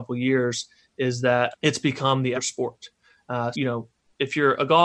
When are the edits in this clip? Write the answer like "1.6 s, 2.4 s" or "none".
1.5 s, 2.3 s, 3.5 s